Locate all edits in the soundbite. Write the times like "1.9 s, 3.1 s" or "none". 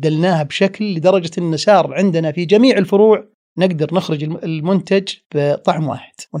none